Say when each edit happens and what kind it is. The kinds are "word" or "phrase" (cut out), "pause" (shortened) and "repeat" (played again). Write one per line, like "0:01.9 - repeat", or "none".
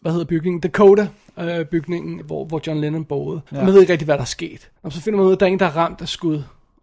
0:02.2 - word
0:03.5 - pause
0:04.8 - pause